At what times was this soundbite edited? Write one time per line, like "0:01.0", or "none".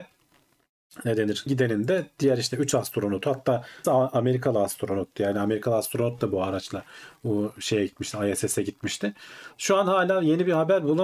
0:01.5
0:03.8

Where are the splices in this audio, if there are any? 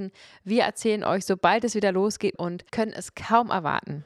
0:02.3
0:02.7

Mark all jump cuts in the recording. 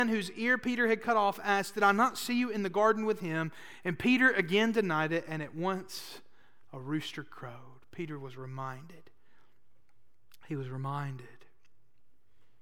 none

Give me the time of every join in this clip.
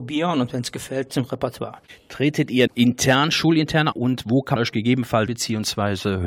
0:01.1
0:02.7
0:03.9
0:04.6
0:05.3

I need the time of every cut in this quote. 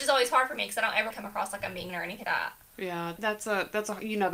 0:01.1
0:01.9
0:02.2
0:03.2

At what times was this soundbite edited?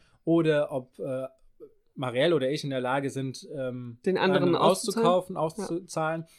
none

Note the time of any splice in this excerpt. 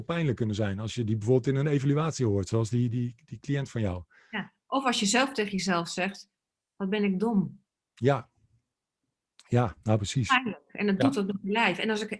none

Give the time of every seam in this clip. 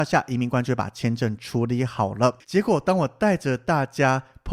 0:02.4

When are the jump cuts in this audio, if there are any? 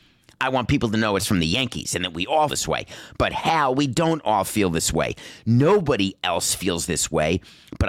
0:02.5

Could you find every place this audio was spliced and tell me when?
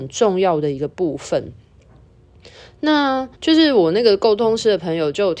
0:03.3

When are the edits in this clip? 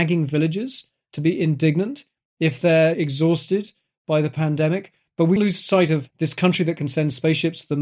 0:05.4
0:06.1

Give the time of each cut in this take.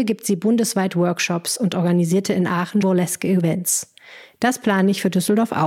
0:02.8

